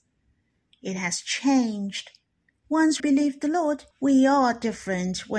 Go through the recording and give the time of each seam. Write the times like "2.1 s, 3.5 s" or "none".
3.0 s, 3.9 s